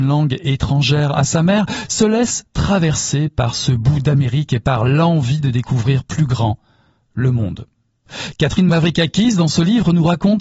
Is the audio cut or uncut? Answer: uncut